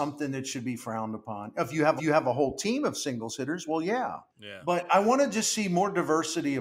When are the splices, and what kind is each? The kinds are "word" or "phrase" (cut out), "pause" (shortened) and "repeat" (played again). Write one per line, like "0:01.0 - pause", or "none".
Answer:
0:02.0 - repeat
0:04.3 - pause
0:04.9 - word